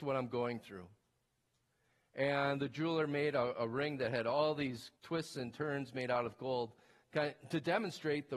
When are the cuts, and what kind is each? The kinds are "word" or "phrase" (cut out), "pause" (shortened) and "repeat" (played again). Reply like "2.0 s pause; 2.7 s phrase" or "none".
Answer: 5.0 s pause